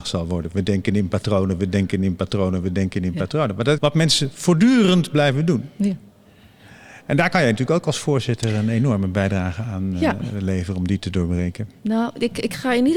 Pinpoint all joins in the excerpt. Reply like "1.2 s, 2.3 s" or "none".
3.8 s